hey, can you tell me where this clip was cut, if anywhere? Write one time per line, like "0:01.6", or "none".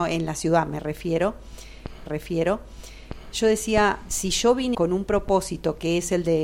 0:02.1
0:04.1
0:04.7

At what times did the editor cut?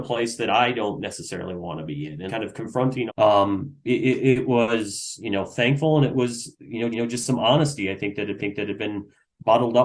0:02.3
0:03.1
0:06.9
0:08.4

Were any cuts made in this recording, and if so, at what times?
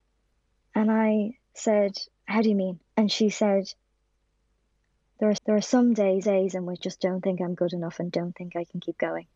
0:02.1
0:02.9
0:05.4
0:06.2
0:06.8

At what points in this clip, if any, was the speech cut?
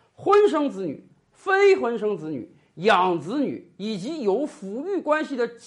none

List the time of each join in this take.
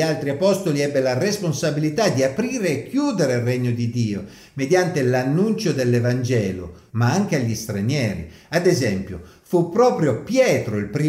0:06.9

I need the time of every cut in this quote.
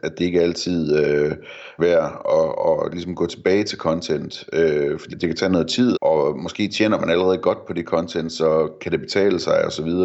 0:01.8
0:05.1
0:05.9

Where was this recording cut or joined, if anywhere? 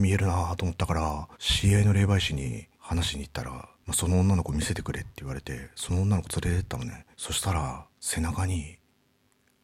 0:01.3
0:02.7
0:03.8
0:07.1
0:07.9

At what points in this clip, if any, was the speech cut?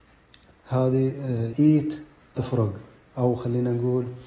0:01.5
0:02.4

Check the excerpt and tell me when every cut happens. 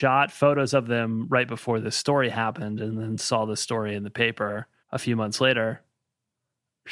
0:04.8

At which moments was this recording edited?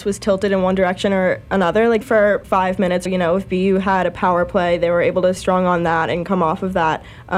0:02.0
0:02.4
0:03.1
0:05.4

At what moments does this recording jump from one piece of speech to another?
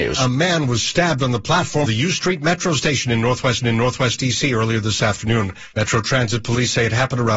0:01.8
0:03.6
0:05.7

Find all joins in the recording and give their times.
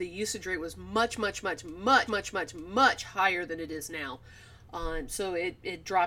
0:02.1

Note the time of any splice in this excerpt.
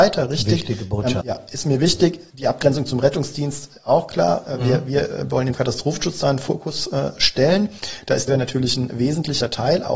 0:01.2
0:05.5
0:08.3

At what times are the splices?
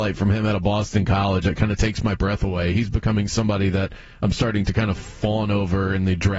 none

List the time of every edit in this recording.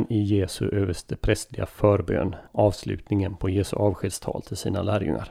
0:02.5

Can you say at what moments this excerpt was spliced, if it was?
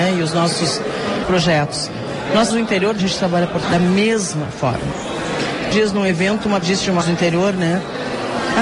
0:01.2
0:02.5
0:03.0
0:03.6
0:05.7
0:06.6
0:07.0

